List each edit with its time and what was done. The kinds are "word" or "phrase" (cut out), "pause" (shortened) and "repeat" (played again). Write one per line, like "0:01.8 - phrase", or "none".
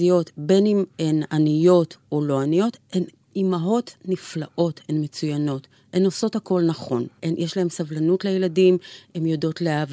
0:07.2 - pause